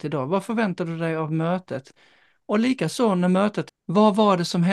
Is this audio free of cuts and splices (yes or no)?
no